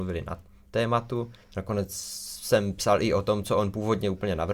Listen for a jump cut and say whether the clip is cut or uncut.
cut